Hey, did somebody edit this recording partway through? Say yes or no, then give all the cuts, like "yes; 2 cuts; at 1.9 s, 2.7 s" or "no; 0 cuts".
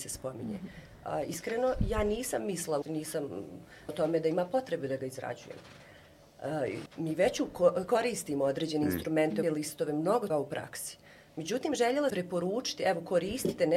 yes; 6 cuts; at 2.8 s, 3.9 s, 6.9 s, 9.4 s, 10.3 s, 12.1 s